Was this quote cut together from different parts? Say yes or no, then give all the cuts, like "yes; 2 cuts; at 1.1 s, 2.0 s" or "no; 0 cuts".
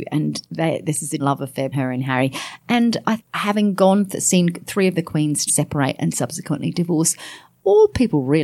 yes; 4 cuts; at 1.2 s, 1.7 s, 3.2 s, 5.5 s